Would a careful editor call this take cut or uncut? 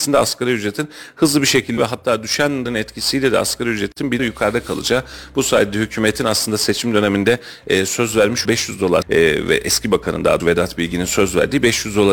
cut